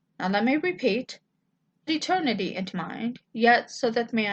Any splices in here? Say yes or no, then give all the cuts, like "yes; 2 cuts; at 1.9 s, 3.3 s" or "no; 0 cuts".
yes; 2 cuts; at 1.9 s, 2.7 s